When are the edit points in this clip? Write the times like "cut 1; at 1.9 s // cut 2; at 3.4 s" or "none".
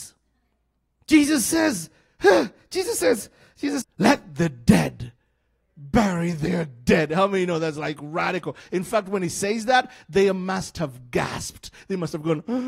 cut 1; at 3.8 s